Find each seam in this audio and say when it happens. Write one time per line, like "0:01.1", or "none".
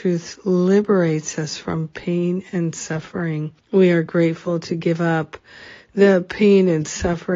0:03.6